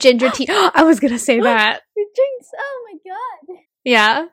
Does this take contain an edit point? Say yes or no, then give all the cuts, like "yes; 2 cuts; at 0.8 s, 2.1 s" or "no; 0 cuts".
no; 0 cuts